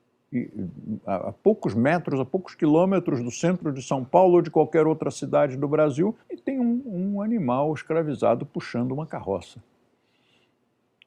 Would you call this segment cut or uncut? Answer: cut